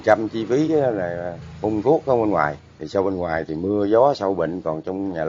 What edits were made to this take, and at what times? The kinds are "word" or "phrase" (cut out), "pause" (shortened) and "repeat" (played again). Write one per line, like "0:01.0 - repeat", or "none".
none